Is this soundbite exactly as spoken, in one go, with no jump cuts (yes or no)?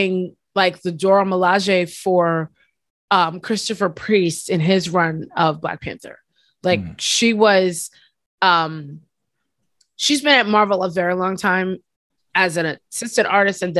yes